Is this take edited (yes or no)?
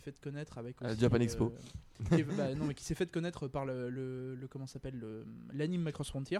no